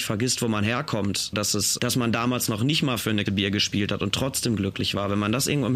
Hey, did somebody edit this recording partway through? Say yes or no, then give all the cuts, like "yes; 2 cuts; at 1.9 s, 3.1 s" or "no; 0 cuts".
yes; 3 cuts; at 1.3 s, 1.8 s, 3.3 s